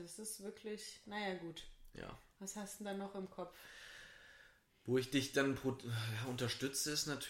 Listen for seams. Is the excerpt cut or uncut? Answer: uncut